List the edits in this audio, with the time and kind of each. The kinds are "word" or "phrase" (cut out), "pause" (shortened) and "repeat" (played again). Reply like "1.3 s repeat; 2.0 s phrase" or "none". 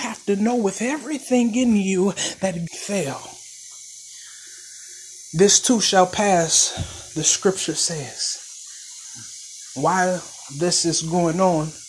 2.7 s phrase